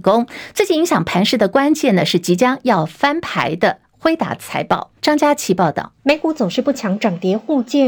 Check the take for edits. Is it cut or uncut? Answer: cut